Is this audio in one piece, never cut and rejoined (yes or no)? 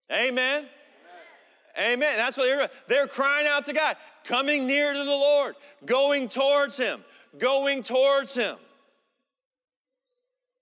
yes